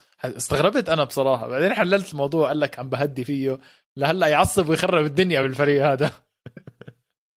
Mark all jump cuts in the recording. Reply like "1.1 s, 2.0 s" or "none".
none